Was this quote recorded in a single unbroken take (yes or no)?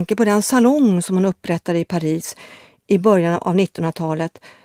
yes